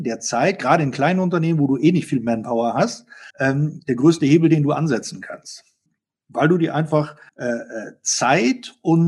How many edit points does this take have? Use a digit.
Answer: 3